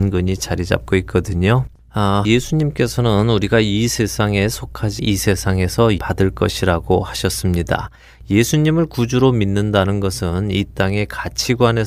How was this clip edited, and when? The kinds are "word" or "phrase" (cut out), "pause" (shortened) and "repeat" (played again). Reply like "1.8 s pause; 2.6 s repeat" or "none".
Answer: 2.2 s word; 5.0 s word; 6.0 s phrase